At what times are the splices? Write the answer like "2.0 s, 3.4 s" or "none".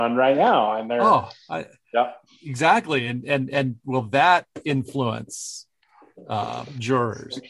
none